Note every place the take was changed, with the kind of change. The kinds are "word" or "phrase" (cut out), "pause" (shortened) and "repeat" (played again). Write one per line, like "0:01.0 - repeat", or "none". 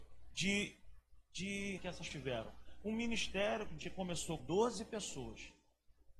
0:01.8 - word
0:02.1 - word
0:03.8 - word
0:04.4 - word